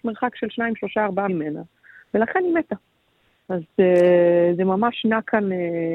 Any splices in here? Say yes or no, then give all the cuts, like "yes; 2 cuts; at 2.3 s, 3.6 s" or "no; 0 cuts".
yes; 1 cut; at 1.3 s